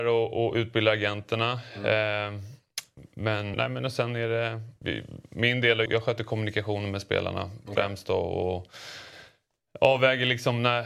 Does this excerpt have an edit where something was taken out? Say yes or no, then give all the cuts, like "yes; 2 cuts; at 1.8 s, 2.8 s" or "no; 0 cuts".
yes; 3 cuts; at 3.5 s, 4.8 s, 5.9 s